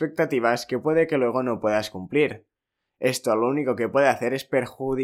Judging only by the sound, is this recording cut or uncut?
uncut